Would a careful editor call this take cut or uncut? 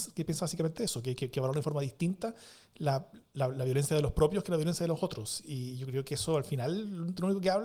uncut